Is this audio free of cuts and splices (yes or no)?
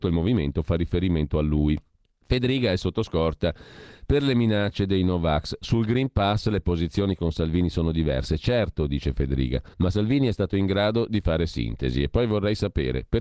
no